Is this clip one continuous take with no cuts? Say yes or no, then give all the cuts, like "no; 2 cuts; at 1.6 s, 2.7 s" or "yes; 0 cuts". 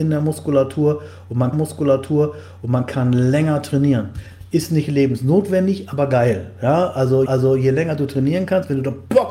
no; 2 cuts; at 1.5 s, 7.3 s